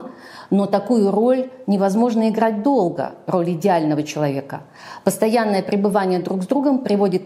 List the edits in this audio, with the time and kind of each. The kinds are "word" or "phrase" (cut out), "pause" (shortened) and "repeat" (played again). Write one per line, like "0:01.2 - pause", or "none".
none